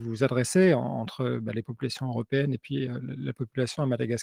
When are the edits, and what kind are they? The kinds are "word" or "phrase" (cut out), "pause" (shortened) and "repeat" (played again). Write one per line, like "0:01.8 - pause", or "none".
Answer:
none

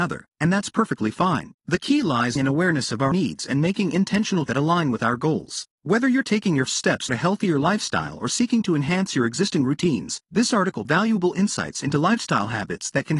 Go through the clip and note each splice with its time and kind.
0:01.6 - pause
0:02.4 - phrase
0:03.1 - word
0:04.5 - word
0:05.7 - pause
0:06.7 - word
0:07.1 - word
0:10.2 - pause
0:10.8 - word

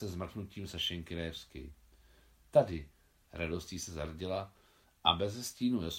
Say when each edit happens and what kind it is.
none

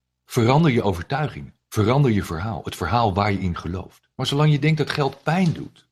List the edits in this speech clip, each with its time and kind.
0:01.6 - pause
0:04.1 - pause

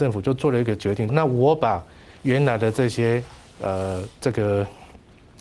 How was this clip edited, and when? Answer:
0:01.1 - phrase

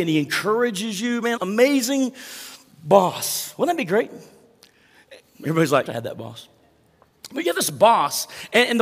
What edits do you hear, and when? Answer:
0:01.4 - phrase
0:05.9 - phrase

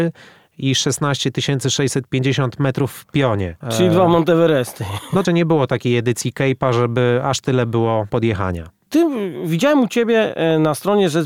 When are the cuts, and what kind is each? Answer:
0:03.6 - pause
0:05.2 - phrase
0:08.1 - word

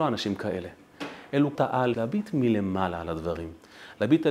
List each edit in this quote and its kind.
0:01.6 - word
0:01.9 - phrase

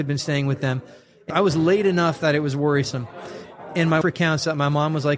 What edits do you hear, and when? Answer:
0:01.3 - phrase
0:04.0 - word

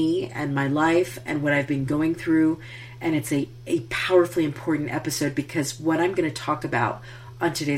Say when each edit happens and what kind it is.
none

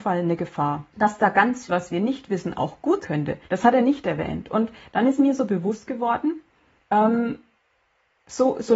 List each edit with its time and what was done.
0:00.9 - pause
0:01.7 - word
0:03.0 - word
0:03.4 - pause

